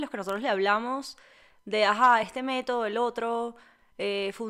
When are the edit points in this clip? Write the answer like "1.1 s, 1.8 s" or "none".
none